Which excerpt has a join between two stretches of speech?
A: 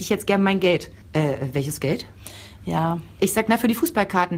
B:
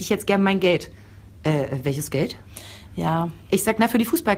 A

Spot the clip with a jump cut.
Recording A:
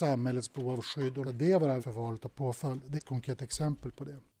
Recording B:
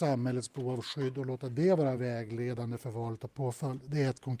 A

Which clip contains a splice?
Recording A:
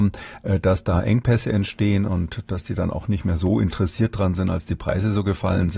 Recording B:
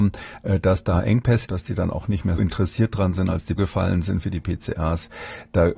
B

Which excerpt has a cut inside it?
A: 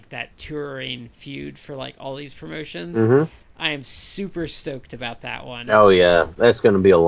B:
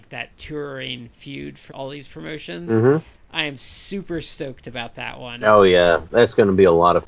B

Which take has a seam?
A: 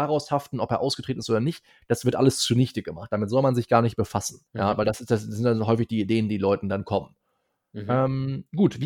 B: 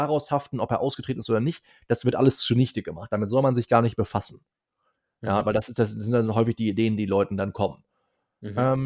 A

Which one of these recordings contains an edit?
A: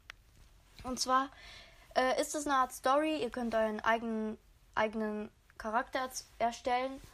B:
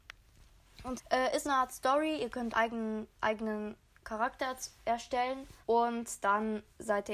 B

